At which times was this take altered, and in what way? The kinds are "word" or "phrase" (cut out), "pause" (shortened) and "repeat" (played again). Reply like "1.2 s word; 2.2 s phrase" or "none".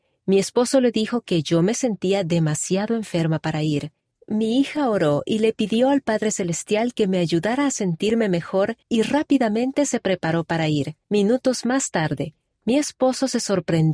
4.0 s pause; 8.8 s pause; 11.0 s pause